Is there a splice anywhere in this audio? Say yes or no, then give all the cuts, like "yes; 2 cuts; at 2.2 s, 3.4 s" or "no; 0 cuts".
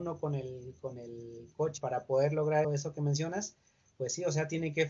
yes; 2 cuts; at 1.8 s, 2.6 s